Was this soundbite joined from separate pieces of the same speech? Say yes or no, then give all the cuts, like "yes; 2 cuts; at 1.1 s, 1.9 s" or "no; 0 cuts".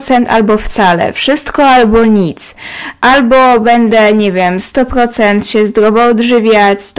no; 0 cuts